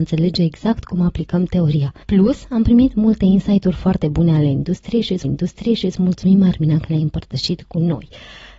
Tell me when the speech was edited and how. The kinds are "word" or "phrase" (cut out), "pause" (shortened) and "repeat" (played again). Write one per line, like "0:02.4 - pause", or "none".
0:02.0 - pause
0:05.2 - repeat